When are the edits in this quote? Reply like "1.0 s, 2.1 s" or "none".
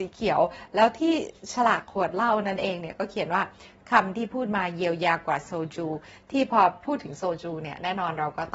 none